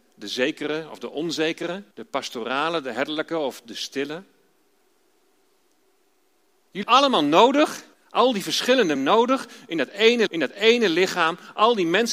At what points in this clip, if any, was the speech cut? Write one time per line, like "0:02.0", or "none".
0:01.9
0:06.8
0:07.9
0:09.0
0:10.3